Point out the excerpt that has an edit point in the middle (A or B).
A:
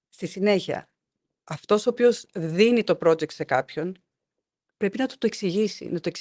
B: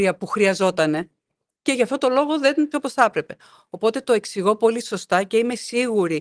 B